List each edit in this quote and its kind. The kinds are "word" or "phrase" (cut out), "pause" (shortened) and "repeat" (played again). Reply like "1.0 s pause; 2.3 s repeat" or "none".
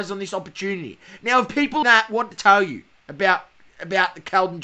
1.8 s phrase; 2.3 s word; 3.5 s pause